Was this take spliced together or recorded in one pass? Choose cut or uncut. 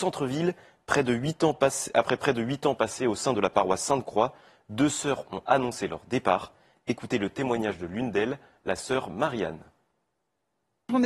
uncut